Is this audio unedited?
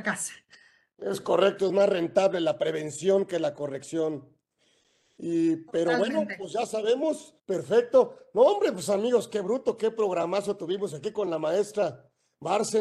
no; 1 cut; at 7.4 s

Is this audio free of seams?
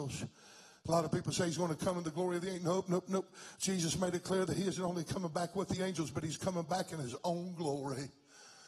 yes; 0 cuts

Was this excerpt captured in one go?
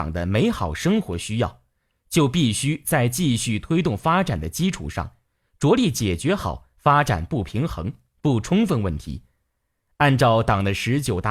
yes; 0 cuts

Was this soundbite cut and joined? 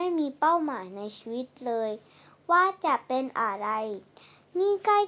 no; 0 cuts

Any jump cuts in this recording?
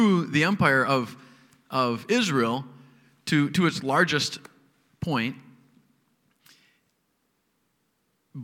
no; 0 cuts

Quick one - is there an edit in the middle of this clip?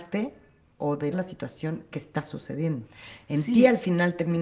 yes; 1 cut; at 1.1 s

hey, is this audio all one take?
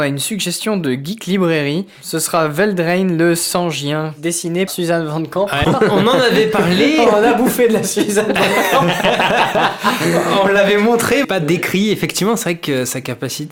no; 3 cuts; at 4.7 s, 5.6 s, 11.2 s

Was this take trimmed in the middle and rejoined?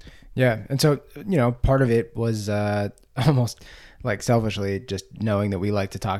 no; 0 cuts

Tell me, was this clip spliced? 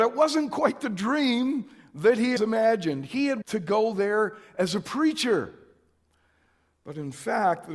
yes; 2 cuts; at 2.4 s, 3.4 s

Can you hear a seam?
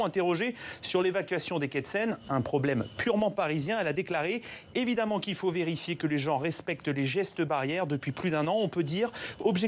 no; 0 cuts

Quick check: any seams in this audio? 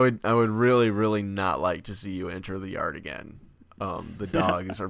no; 0 cuts

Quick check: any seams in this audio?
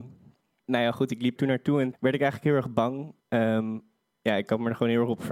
yes; 3 cuts; at 1.4 s, 1.9 s, 3.2 s

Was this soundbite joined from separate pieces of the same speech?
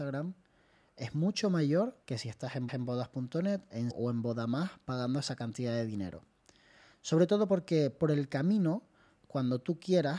yes; 3 cuts; at 2.0 s, 2.7 s, 3.9 s

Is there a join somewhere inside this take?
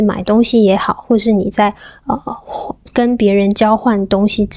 no; 0 cuts

